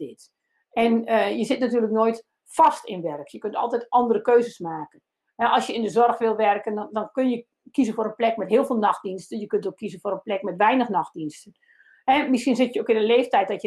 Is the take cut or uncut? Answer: uncut